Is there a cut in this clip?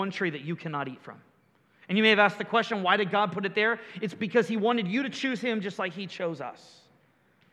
no; 0 cuts

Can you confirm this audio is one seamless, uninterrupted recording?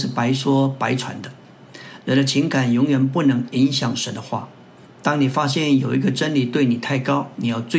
yes; 0 cuts

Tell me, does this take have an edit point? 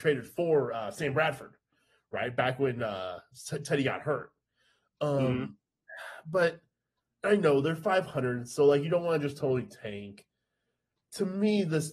no; 0 cuts

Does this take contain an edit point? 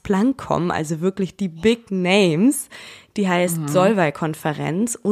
no; 0 cuts

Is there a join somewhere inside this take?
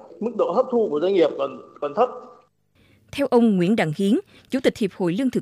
no; 0 cuts

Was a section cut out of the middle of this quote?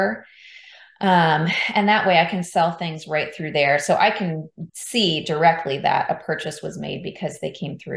yes; 1 cut; at 4.7 s

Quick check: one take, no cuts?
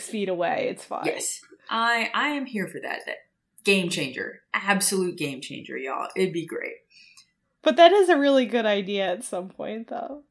no; 1 cut; at 7.4 s

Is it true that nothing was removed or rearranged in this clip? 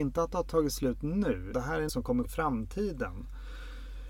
no; 3 cuts; at 1.5 s, 1.9 s, 2.2 s

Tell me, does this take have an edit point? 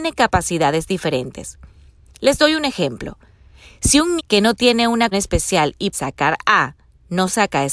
yes; 3 cuts; at 4.2 s, 5.1 s, 5.9 s

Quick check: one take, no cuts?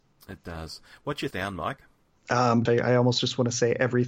no; 2 cuts; at 1.3 s, 2.7 s

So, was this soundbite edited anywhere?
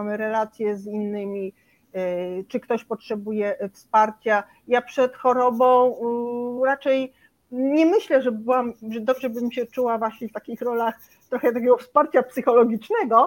no; 0 cuts

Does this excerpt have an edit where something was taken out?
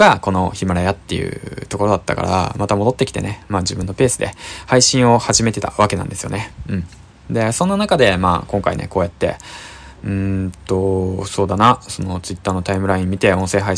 no; 0 cuts

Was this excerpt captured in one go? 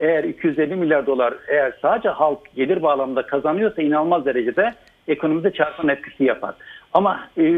yes; 0 cuts

